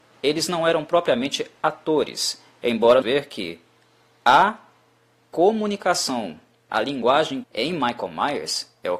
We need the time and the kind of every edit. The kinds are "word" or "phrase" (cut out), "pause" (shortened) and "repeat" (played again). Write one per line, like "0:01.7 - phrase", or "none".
0:03.0 - phrase
0:06.7 - word
0:07.4 - word